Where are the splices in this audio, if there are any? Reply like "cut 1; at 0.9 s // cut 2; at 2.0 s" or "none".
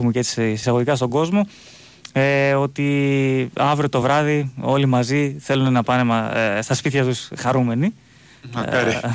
none

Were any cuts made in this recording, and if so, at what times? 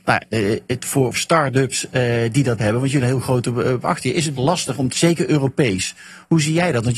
cut 1; at 1.1 s // cut 2; at 2.6 s // cut 3; at 3.0 s // cut 4; at 3.8 s // cut 5; at 4.4 s // cut 6; at 4.9 s

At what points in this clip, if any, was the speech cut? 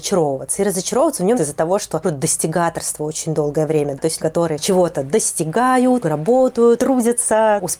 cut 1; at 1.3 s // cut 2; at 2.0 s // cut 3; at 4.2 s // cut 4; at 6.0 s

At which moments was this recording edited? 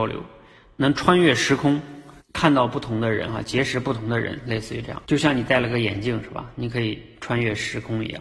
cut 1; at 2.2 s // cut 2; at 5.0 s

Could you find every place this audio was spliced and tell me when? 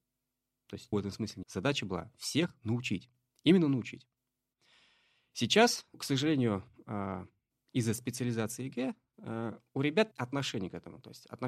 cut 1; at 0.9 s // cut 2; at 1.4 s // cut 3; at 5.9 s // cut 4; at 10.1 s

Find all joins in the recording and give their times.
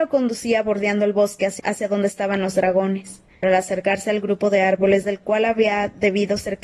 cut 1; at 1.6 s // cut 2; at 3.4 s // cut 3; at 5.0 s

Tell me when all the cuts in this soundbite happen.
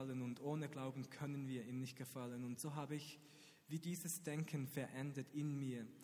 none

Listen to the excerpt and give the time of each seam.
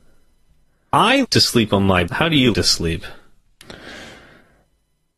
cut 1; at 1.2 s // cut 2; at 2.1 s // cut 3; at 2.5 s

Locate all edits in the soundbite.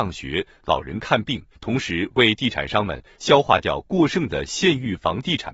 cut 1; at 1.5 s

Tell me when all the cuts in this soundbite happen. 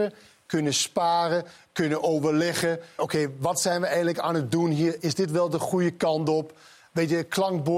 cut 1; at 3.0 s

